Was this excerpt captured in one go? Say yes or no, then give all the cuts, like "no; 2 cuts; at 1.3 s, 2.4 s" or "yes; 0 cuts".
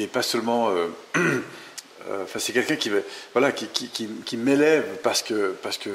yes; 0 cuts